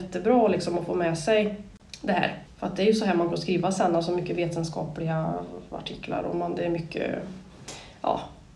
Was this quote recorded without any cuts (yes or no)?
no